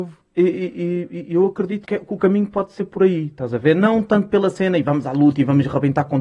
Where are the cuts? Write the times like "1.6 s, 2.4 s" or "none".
1.8 s